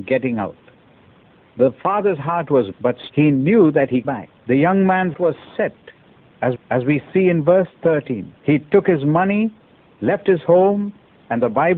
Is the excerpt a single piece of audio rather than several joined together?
no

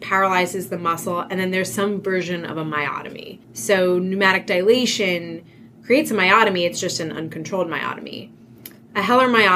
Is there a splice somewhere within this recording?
yes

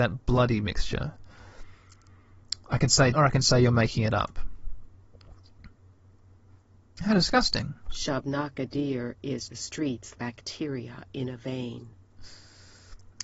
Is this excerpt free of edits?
no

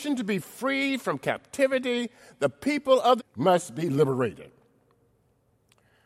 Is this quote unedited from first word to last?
no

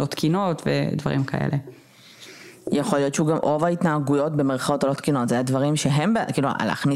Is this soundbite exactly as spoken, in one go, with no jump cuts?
yes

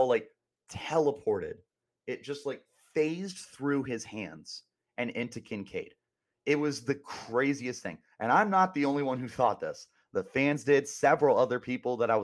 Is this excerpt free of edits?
yes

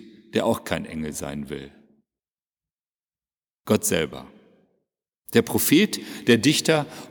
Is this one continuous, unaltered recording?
yes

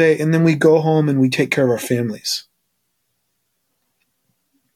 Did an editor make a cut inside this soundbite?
no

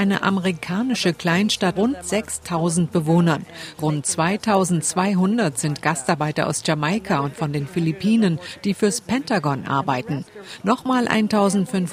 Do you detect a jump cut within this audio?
yes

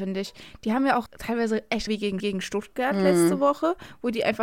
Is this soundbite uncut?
no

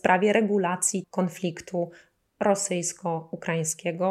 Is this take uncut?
no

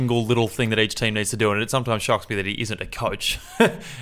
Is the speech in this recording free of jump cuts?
yes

